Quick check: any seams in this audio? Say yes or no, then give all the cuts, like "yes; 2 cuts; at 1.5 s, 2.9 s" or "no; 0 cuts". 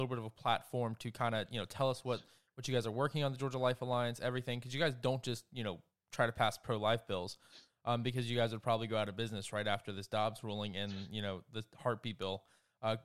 no; 0 cuts